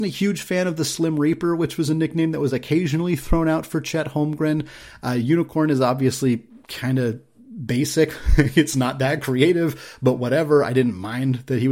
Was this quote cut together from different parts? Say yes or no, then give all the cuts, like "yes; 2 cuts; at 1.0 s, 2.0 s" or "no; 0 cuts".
no; 0 cuts